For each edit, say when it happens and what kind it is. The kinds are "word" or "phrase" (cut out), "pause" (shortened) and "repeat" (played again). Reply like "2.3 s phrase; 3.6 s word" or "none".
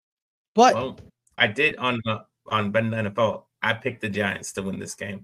1.4 s word; 2.5 s word